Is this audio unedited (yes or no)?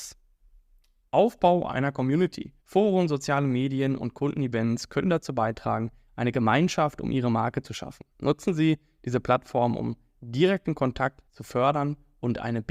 no